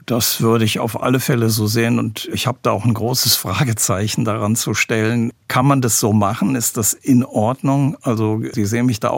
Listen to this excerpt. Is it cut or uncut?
uncut